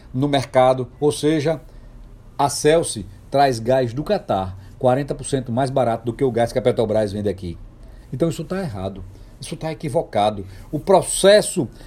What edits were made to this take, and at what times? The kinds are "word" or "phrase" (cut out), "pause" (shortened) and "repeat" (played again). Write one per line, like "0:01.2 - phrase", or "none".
none